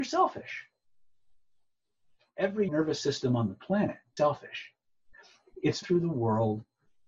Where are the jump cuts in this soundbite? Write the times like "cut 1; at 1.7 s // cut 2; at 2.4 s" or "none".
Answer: cut 1; at 2.7 s // cut 2; at 4.2 s // cut 3; at 5.8 s